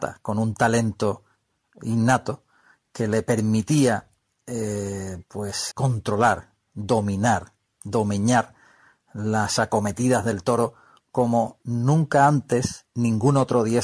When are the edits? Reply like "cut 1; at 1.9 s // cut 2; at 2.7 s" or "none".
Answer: cut 1; at 5.7 s